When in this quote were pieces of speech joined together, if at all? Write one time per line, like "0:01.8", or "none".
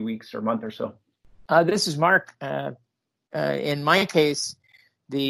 none